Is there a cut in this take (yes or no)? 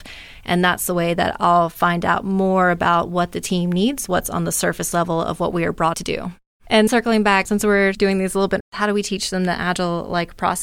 yes